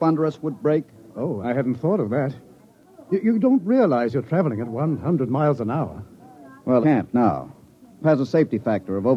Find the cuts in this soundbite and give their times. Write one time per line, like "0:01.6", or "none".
0:01.4
0:06.8
0:07.1
0:08.0